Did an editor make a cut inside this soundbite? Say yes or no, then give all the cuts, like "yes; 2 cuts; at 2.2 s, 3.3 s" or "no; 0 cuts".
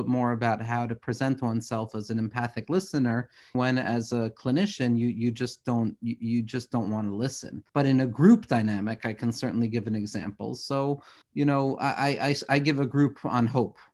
yes; 3 cuts; at 3.5 s, 7.7 s, 11.2 s